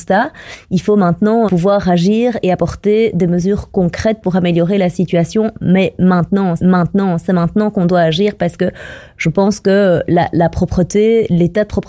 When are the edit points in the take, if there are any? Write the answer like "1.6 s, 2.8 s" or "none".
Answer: 1.5 s, 6.6 s